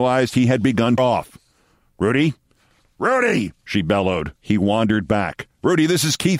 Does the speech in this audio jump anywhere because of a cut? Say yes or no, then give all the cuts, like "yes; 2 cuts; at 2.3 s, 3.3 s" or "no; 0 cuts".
yes; 3 cuts; at 1.0 s, 3.6 s, 4.4 s